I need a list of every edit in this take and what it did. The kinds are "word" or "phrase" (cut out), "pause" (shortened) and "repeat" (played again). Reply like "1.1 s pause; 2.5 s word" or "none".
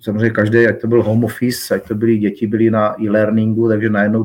none